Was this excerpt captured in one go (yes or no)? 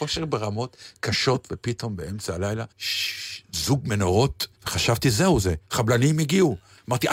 no